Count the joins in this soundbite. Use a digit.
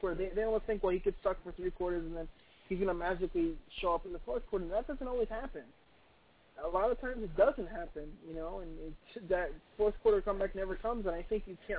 0